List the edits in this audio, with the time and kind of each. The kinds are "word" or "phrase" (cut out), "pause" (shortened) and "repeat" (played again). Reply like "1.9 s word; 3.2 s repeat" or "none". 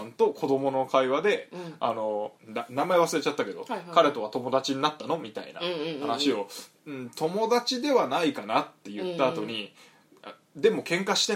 2.4 s pause

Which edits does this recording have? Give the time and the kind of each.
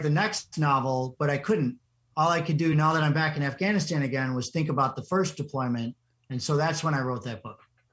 none

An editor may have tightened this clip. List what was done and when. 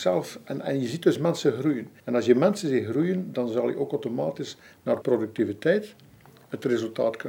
2.0 s pause; 5.0 s word

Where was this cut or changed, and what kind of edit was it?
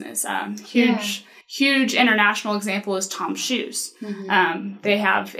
1.4 s pause

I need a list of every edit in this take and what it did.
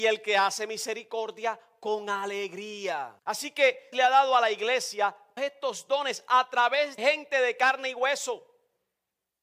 3.2 s pause; 3.9 s word; 5.4 s word; 7.0 s word

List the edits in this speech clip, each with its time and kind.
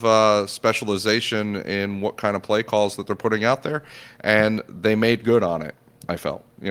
none

